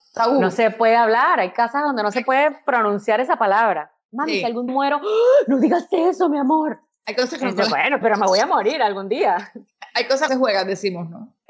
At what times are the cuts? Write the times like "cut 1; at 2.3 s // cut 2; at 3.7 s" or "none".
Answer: cut 1; at 4.7 s // cut 2; at 8.0 s // cut 3; at 10.3 s